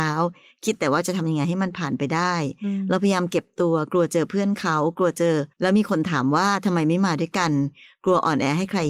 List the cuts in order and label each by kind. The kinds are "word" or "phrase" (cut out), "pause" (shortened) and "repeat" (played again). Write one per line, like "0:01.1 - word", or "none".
0:05.5 - pause